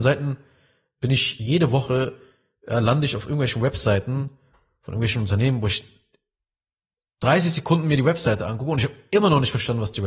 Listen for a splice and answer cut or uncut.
uncut